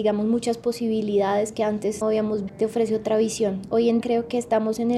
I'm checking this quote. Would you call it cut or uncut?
cut